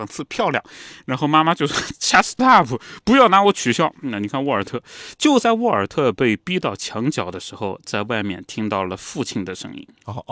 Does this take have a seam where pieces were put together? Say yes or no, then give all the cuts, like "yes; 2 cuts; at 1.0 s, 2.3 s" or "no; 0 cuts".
yes; 1 cut; at 2.4 s